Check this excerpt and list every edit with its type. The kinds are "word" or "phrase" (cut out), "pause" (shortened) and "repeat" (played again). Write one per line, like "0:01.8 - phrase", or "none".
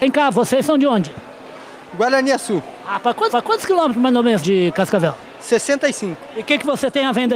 0:03.3 - repeat
0:04.4 - word